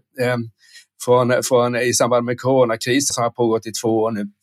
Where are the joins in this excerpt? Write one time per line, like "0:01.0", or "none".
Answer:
0:03.1